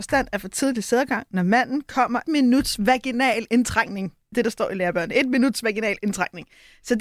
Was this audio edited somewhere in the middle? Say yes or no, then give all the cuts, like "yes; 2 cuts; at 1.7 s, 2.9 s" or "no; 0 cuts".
yes; 2 cuts; at 2.2 s, 4.3 s